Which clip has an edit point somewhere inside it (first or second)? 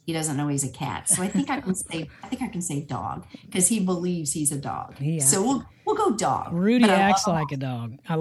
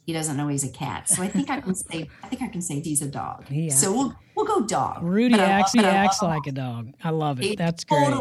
second